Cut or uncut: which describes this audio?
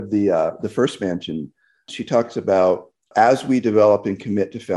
uncut